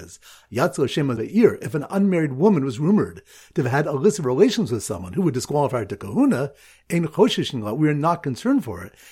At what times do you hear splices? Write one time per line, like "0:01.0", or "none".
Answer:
0:01.2